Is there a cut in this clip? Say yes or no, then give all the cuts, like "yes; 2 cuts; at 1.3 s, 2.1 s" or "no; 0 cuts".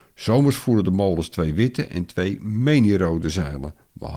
no; 0 cuts